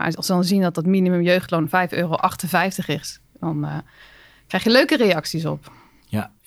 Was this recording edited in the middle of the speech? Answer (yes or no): no